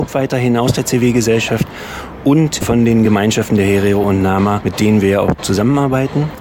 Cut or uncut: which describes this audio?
uncut